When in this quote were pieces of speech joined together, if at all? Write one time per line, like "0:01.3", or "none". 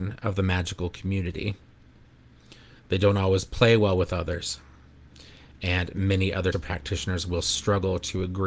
0:02.8
0:06.5